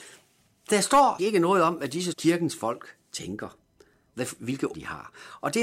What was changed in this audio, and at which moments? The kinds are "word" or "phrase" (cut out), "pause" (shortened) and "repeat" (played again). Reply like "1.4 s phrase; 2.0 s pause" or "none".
1.2 s word; 2.1 s word; 4.7 s word